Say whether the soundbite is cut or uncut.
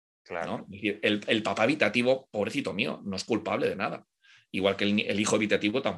uncut